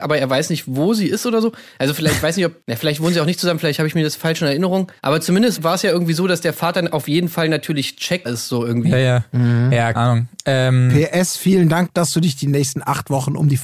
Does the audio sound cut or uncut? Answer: cut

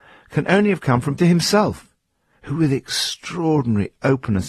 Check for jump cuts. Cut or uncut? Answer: cut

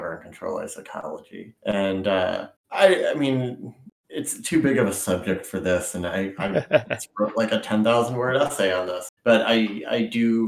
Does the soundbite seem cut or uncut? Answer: cut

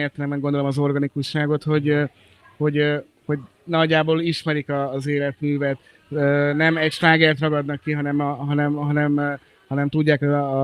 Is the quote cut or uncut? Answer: uncut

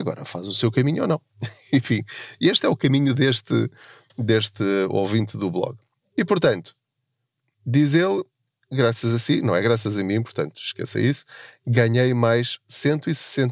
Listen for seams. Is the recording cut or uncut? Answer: uncut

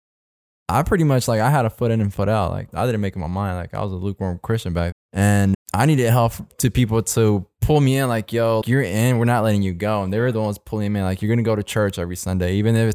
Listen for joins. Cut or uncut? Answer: cut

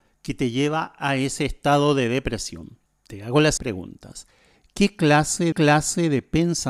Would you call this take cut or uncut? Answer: cut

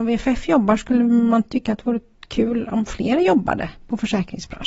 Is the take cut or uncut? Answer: uncut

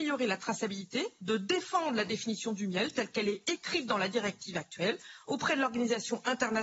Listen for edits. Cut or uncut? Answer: uncut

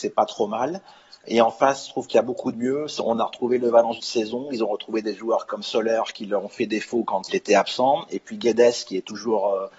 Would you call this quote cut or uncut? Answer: cut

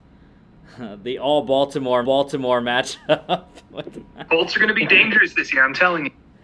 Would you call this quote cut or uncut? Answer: cut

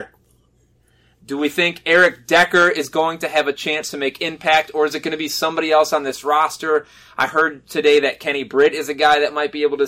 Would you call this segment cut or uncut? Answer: uncut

